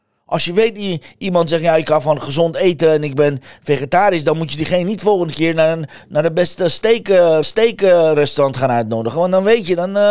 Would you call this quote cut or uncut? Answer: cut